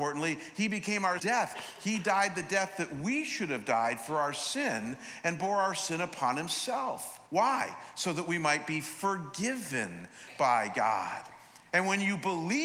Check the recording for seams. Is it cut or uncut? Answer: cut